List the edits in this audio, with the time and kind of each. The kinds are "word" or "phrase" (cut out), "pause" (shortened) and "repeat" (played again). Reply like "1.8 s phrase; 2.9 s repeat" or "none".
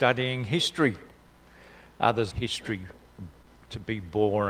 2.3 s phrase